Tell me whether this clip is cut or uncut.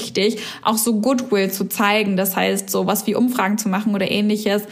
uncut